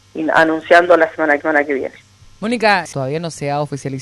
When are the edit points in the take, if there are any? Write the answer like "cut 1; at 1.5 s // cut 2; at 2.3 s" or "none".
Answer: cut 1; at 1.4 s // cut 2; at 2.2 s // cut 3; at 2.9 s